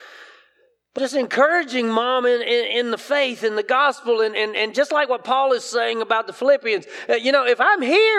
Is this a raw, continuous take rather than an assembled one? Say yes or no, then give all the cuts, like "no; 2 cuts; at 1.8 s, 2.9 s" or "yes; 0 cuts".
no; 1 cut; at 1.0 s